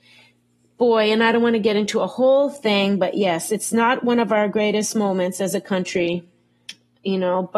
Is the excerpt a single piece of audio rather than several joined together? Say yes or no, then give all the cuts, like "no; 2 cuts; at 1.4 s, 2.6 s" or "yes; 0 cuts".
yes; 0 cuts